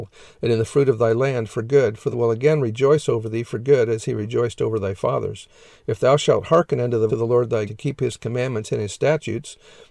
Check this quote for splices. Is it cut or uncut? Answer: cut